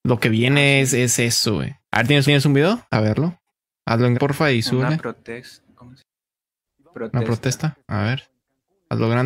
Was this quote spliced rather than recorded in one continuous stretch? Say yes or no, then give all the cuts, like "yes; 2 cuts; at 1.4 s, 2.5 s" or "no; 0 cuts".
yes; 7 cuts; at 1.8 s, 2.2 s, 2.9 s, 3.5 s, 4.1 s, 5.7 s, 7.8 s